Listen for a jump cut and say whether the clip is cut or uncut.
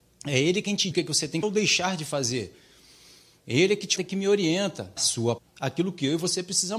cut